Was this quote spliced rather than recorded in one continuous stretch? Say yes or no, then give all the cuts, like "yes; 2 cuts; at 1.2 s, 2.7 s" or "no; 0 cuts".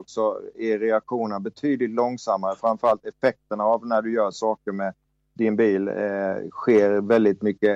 no; 0 cuts